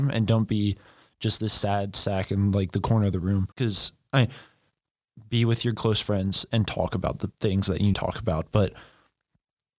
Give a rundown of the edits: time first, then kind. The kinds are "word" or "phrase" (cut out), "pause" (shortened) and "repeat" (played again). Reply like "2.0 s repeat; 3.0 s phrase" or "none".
3.5 s pause; 7.3 s pause; 7.9 s phrase